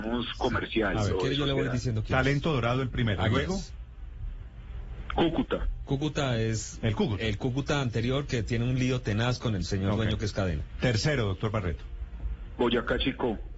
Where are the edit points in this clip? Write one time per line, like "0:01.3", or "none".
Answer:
none